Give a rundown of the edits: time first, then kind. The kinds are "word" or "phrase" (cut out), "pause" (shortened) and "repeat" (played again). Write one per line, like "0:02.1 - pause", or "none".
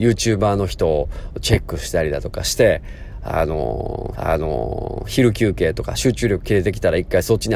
0:04.1 - repeat